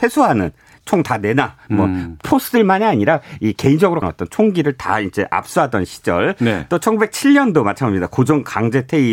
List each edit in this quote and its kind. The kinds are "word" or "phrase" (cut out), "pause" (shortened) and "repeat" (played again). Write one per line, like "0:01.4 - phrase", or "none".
0:04.0 - phrase